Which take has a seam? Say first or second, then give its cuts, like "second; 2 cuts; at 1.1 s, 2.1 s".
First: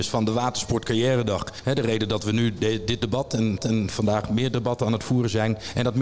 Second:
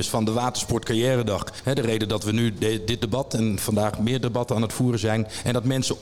first; 1 cut; at 3.6 s